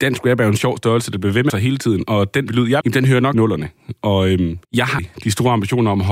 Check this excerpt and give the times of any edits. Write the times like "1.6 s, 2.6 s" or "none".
1.5 s, 2.5 s, 2.8 s, 3.3 s, 4.6 s, 5.0 s